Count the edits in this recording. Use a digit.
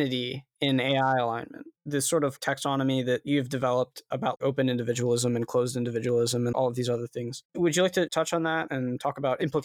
2